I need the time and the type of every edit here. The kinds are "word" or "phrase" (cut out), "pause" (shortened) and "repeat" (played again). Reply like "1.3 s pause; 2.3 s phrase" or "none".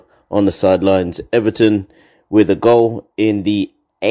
none